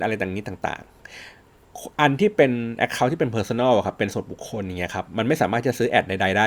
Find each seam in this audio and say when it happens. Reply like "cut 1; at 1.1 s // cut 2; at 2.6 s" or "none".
none